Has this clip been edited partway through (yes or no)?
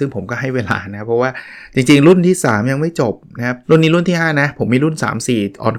yes